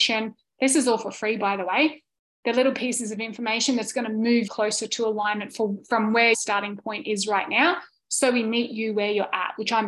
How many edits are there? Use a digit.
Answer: 2